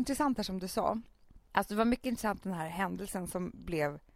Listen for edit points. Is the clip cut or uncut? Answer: cut